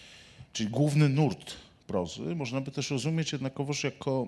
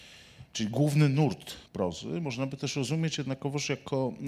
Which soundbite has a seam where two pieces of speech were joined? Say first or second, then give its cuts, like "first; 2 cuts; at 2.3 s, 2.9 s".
second; 1 cut; at 1.7 s